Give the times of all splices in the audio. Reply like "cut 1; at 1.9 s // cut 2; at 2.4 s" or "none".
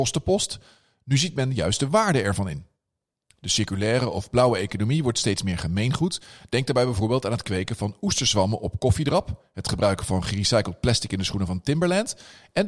none